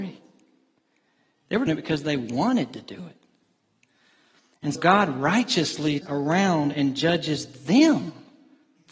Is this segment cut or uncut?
cut